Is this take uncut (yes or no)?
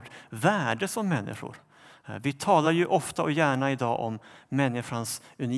yes